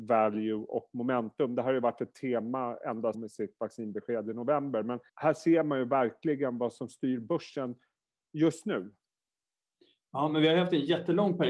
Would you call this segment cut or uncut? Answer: cut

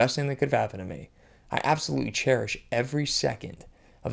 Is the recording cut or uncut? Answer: uncut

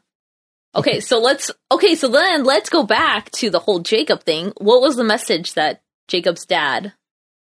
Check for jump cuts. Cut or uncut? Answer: cut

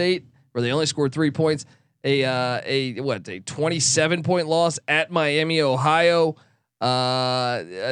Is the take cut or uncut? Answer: uncut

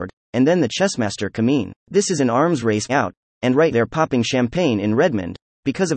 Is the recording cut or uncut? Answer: cut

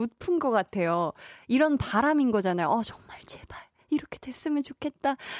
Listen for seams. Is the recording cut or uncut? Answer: uncut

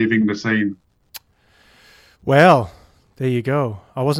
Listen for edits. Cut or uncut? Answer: uncut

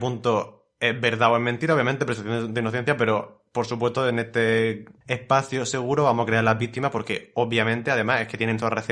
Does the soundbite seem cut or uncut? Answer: uncut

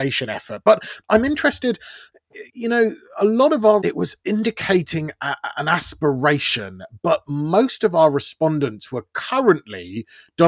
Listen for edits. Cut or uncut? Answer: cut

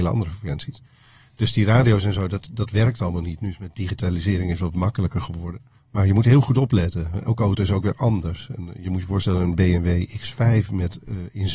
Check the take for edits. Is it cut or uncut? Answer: cut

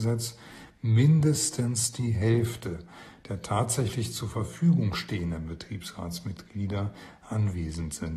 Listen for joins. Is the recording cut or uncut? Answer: uncut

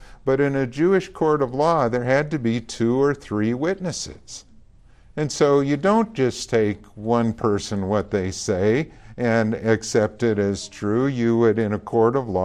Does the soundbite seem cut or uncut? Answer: uncut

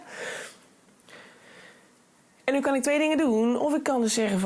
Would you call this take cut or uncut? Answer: uncut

